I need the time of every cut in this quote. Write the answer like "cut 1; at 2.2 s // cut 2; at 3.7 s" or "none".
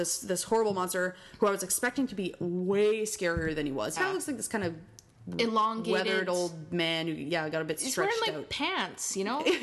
cut 1; at 4.0 s